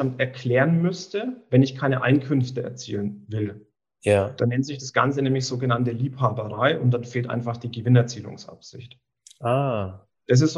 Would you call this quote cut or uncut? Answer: uncut